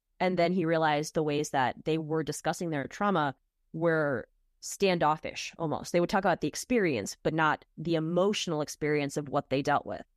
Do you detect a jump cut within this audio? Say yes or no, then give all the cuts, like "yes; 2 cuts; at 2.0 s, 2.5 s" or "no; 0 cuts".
no; 0 cuts